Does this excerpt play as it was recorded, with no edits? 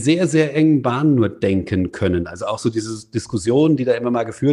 yes; 0 cuts

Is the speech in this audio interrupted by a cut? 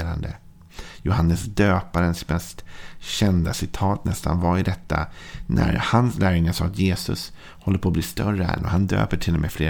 no; 0 cuts

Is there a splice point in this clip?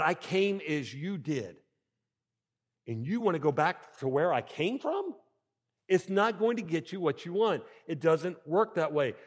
no; 0 cuts

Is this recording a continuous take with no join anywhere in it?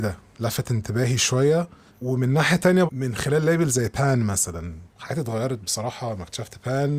no; 3 cuts; at 1.9 s, 2.9 s, 4.9 s

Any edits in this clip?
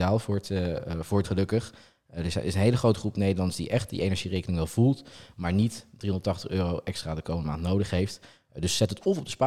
yes; 1 cut; at 1.2 s

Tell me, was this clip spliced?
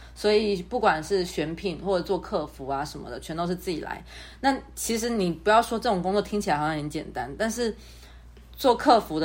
no; 0 cuts

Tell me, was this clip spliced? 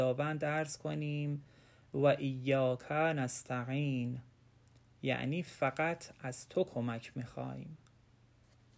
no; 0 cuts

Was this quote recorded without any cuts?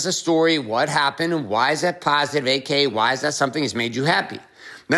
yes; 0 cuts

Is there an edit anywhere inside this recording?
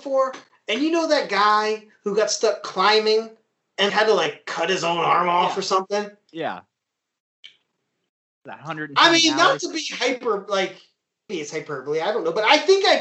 yes; 2 cuts; at 3.9 s, 11.3 s

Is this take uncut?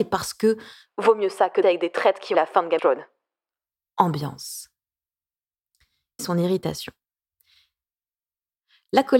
no; 4 cuts; at 1.6 s, 2.3 s, 2.8 s, 6.2 s

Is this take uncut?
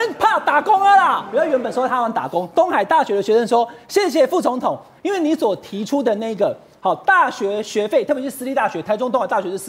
yes; 0 cuts

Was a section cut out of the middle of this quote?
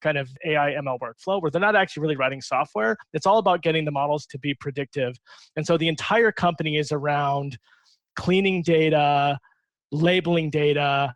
no; 0 cuts

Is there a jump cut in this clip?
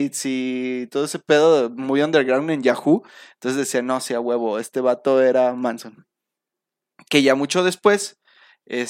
no; 0 cuts

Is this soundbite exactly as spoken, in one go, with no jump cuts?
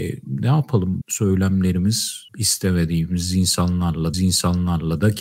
no; 3 cuts; at 1.0 s, 2.3 s, 4.1 s

